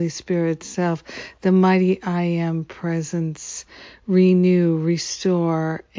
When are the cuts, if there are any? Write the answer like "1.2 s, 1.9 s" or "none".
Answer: none